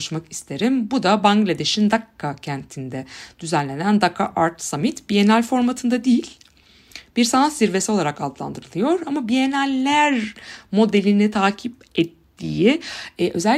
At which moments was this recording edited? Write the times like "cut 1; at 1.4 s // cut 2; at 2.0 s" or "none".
none